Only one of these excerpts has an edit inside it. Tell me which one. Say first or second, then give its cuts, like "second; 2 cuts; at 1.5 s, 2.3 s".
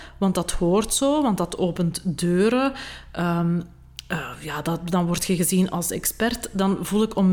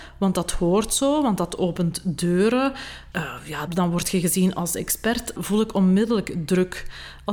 second; 3 cuts; at 3.1 s, 3.7 s, 5.4 s